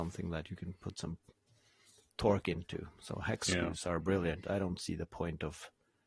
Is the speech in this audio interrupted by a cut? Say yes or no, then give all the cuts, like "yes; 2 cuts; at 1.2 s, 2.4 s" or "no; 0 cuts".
no; 0 cuts